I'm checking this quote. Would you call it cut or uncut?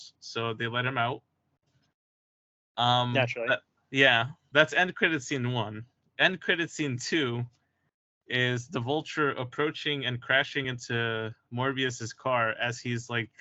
uncut